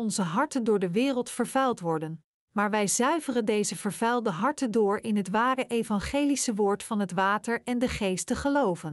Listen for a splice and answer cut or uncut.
uncut